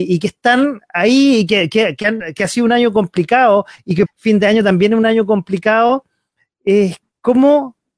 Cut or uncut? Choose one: cut